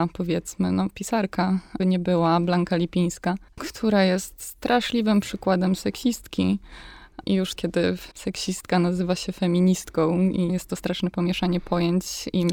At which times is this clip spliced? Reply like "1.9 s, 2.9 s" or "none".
1.8 s, 3.5 s, 7.6 s, 8.1 s, 10.5 s